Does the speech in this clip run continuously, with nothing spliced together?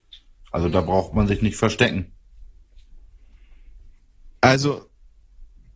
no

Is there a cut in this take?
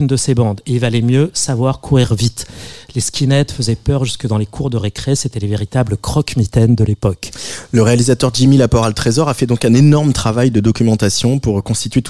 no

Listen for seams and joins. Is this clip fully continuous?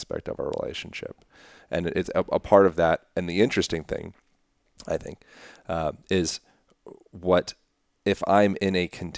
yes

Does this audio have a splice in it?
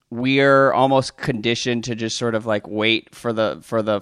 no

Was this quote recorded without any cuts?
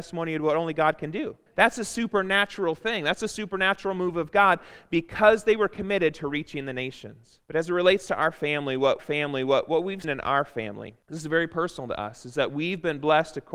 no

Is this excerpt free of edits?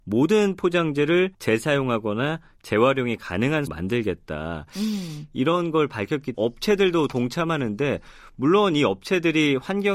no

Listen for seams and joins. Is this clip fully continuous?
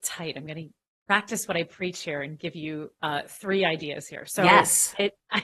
yes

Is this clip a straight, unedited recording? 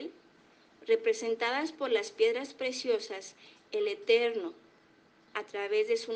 yes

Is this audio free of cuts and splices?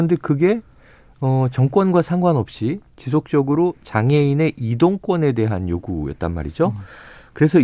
no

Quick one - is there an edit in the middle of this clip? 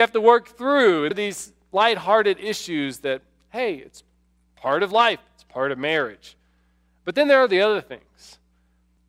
yes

